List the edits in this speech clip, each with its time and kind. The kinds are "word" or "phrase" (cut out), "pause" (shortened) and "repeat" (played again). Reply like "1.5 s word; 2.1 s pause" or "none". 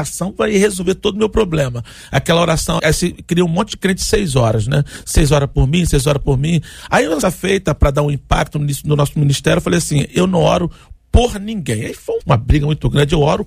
2.8 s word; 7.2 s word; 12.2 s word